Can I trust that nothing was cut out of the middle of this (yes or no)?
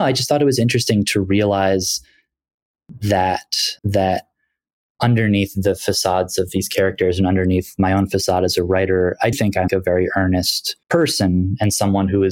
no